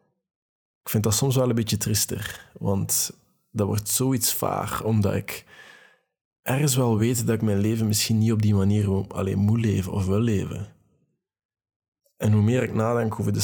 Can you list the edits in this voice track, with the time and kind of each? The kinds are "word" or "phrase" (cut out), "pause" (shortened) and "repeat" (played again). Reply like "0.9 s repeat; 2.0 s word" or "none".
none